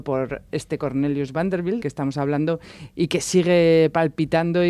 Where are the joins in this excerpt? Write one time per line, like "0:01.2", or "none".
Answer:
0:01.8